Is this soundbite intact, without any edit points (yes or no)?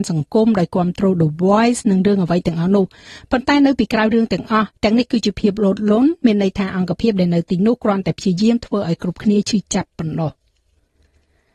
no